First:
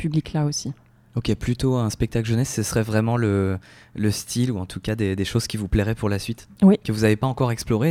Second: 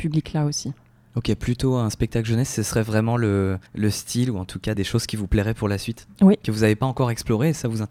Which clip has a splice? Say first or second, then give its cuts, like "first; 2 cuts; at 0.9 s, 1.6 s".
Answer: second; 2 cuts; at 3.7 s, 4.8 s